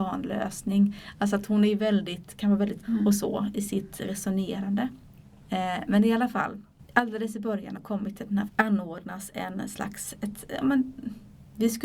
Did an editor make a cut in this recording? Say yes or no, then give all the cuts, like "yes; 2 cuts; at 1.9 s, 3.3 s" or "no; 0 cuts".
yes; 3 cuts; at 2.8 s, 7.8 s, 8.5 s